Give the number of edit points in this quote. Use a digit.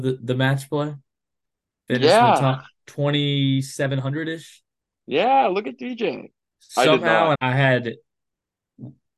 1